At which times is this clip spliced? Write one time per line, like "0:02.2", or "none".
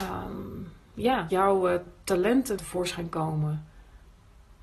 0:01.3
0:02.6